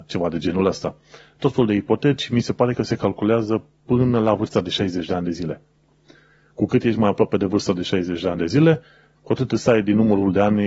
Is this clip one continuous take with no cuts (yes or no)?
yes